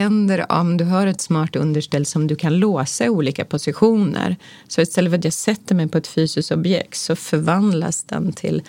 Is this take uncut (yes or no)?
yes